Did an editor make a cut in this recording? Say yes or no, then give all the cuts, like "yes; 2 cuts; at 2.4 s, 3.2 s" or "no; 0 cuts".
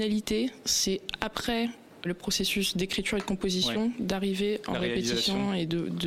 yes; 1 cut; at 2.0 s